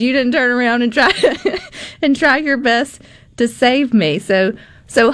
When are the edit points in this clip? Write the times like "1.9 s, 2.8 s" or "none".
none